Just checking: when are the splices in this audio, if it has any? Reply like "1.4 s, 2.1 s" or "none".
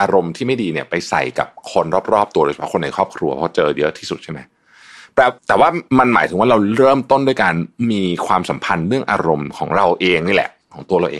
5.4 s, 5.9 s